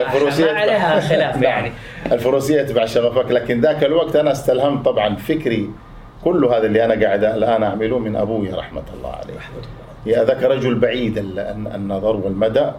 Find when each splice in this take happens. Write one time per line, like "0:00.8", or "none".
none